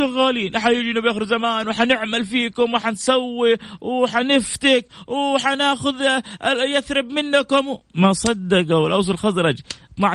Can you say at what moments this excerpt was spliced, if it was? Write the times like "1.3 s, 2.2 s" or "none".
7.9 s